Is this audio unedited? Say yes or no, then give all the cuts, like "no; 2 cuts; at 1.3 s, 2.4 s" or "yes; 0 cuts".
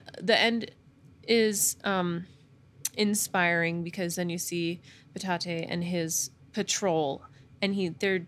yes; 0 cuts